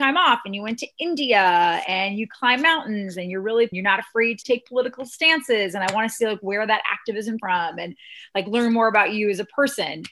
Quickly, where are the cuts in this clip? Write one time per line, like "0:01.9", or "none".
0:03.7
0:04.4
0:07.4

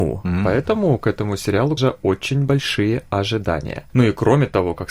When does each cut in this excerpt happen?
0:01.8

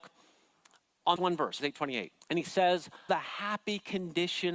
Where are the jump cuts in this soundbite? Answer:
0:01.2
0:01.6
0:02.2
0:03.1

